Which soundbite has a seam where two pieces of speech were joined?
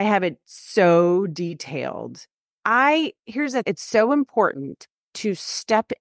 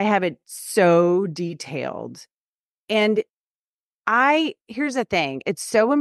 first; 2 cuts; at 2.5 s, 3.6 s

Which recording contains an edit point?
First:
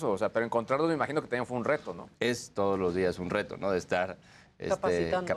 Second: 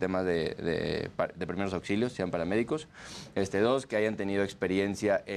first; 1 cut; at 2.1 s

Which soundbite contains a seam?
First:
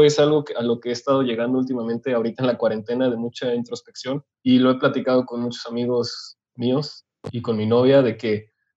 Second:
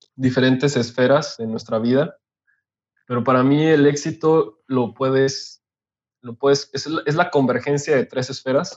first; 2 cuts; at 4.3 s, 6.4 s

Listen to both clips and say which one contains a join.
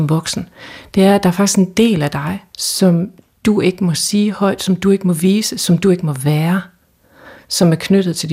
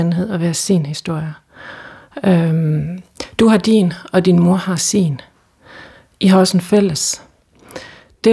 first; 1 cut; at 2.5 s

